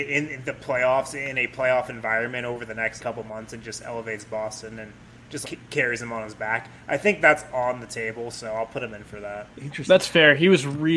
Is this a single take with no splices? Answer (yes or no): no